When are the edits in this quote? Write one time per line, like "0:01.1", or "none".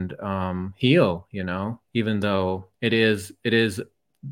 0:01.8
0:02.7